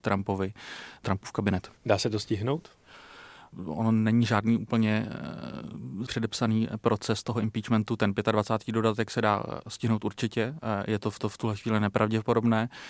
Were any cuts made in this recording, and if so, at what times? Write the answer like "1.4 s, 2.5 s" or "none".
1.8 s, 6.1 s, 11.2 s